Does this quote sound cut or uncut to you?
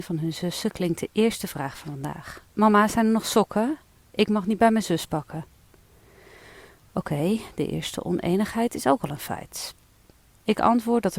cut